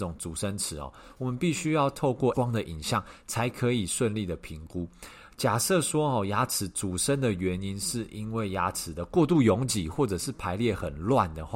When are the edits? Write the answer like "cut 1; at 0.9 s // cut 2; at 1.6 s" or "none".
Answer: cut 1; at 2.3 s